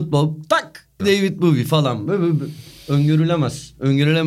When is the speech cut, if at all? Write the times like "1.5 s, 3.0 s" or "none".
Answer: 1.0 s